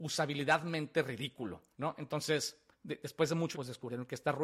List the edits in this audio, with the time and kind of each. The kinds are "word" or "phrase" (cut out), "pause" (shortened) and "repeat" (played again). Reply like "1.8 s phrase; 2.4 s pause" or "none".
1.7 s pause; 3.5 s word